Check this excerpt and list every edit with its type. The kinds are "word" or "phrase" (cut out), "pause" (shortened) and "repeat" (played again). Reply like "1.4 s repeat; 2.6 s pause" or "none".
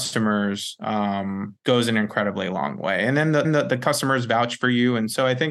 1.6 s pause; 3.4 s repeat